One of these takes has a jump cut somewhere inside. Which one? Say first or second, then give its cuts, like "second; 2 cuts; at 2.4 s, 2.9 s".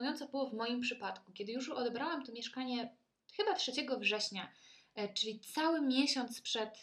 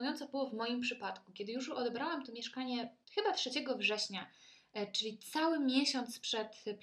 second; 1 cut; at 3.0 s